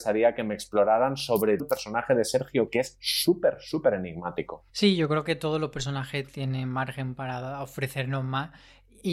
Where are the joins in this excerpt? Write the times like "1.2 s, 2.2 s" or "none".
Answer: 1.6 s